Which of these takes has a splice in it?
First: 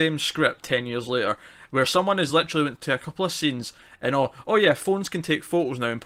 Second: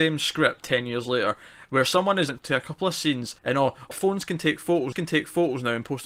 second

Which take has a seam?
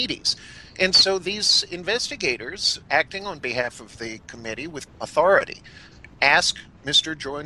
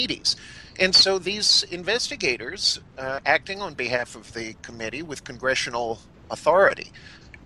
first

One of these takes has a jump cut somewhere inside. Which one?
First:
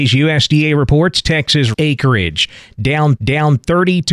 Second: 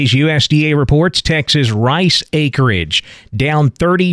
first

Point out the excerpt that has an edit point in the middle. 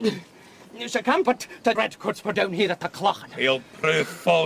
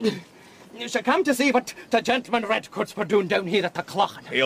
first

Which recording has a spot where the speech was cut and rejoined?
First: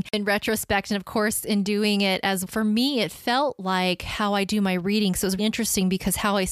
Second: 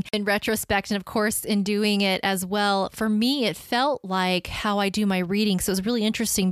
first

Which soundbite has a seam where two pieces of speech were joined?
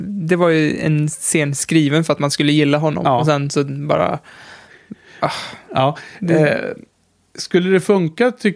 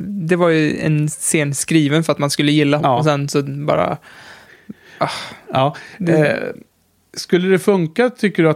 second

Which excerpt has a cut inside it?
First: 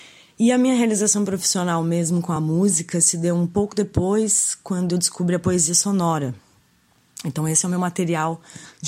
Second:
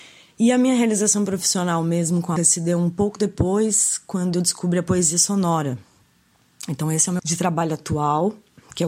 second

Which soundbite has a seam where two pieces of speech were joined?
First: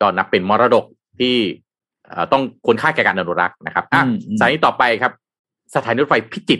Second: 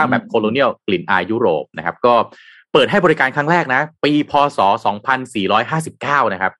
second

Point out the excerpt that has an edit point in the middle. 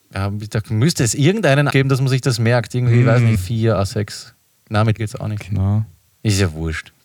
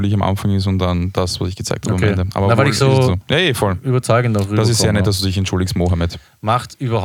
first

